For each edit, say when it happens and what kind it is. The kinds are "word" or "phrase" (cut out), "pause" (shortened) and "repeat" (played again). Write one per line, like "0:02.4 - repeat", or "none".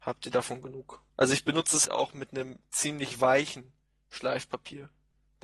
0:01.1 - pause
0:01.8 - word